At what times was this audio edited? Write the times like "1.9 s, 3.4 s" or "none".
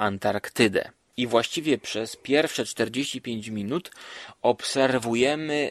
none